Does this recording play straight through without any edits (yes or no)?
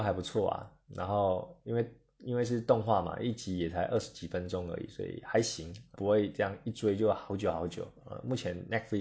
no